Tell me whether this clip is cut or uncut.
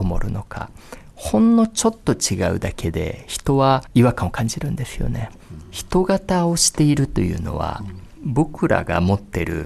cut